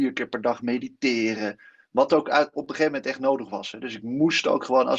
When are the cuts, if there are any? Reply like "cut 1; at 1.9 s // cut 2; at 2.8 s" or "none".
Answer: none